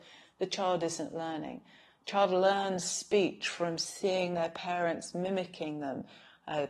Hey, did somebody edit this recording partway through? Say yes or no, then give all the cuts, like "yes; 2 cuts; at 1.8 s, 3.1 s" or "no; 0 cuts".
no; 0 cuts